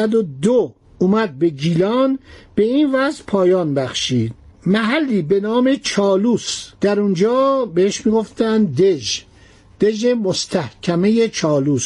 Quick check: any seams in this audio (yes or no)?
yes